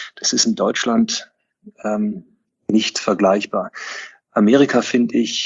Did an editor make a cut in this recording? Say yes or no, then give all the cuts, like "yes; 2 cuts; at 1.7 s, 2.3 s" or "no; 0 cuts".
no; 0 cuts